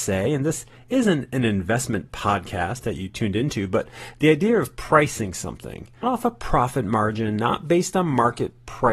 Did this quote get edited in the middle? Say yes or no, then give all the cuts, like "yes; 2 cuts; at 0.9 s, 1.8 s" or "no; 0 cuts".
yes; 1 cut; at 6.0 s